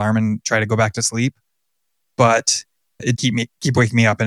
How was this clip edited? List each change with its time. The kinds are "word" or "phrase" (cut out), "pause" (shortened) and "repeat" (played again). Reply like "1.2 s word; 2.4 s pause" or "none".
3.2 s word